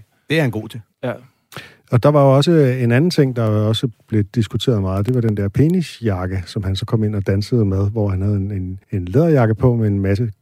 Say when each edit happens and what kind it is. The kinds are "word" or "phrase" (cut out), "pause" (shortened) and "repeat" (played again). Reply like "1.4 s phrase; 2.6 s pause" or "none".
8.8 s pause

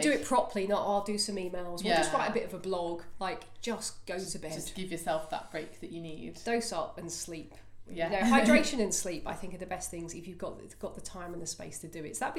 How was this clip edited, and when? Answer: none

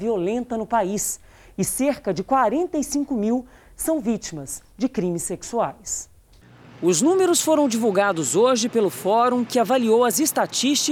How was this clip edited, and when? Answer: none

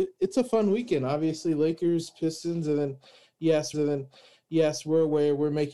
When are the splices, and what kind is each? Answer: 3.7 s repeat

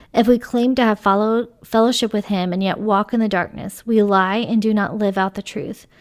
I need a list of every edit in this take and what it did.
none

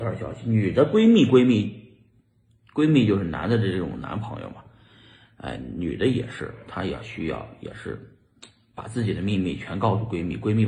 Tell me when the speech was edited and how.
none

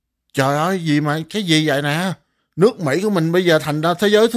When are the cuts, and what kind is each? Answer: 2.4 s pause

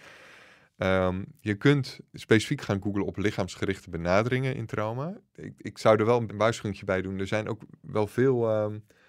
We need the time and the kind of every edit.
2.1 s word; 6.3 s phrase

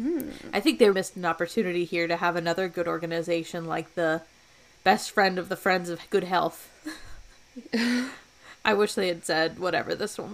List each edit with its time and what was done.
0.9 s word

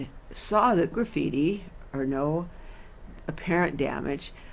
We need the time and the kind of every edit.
0.9 s phrase

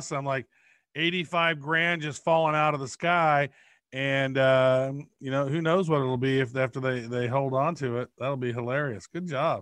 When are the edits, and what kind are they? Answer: none

